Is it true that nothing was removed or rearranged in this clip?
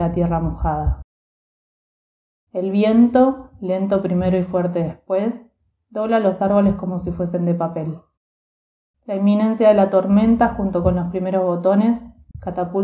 yes; 0 cuts

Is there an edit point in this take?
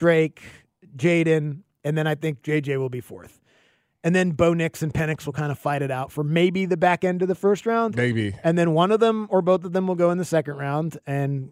no; 0 cuts

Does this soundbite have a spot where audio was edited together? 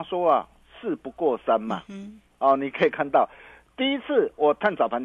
no; 0 cuts

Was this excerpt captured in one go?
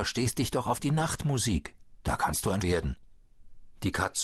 no; 1 cut; at 2.6 s

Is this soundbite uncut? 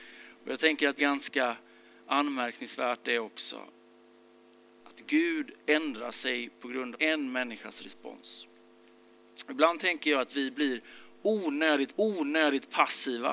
no; 3 cuts; at 1.0 s, 6.9 s, 11.9 s

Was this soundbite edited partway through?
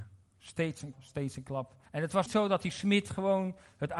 yes; 3 cuts; at 0.9 s, 1.9 s, 2.3 s

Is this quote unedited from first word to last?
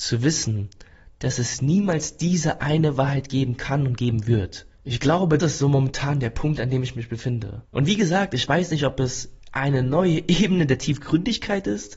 no; 3 cuts; at 4.7 s, 5.4 s, 7.6 s

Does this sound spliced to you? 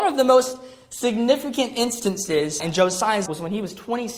yes; 2 cuts; at 2.6 s, 3.3 s

